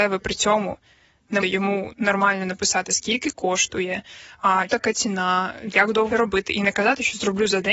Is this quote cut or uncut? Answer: cut